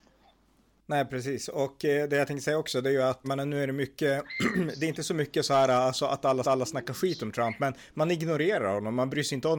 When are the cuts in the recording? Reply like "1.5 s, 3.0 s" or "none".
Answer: 3.2 s, 6.4 s